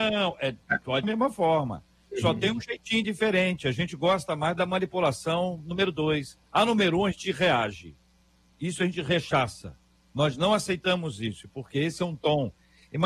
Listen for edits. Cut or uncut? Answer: cut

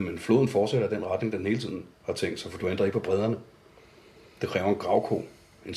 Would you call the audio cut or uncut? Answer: cut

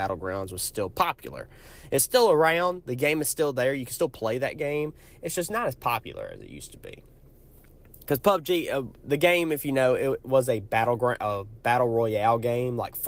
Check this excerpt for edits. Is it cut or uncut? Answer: uncut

